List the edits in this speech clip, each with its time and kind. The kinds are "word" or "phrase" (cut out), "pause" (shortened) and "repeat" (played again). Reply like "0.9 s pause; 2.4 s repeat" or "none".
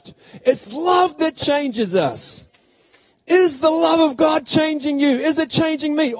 none